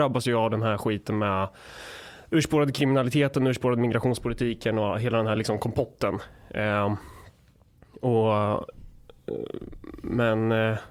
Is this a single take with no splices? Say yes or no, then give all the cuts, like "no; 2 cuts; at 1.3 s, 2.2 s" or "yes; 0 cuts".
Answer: yes; 0 cuts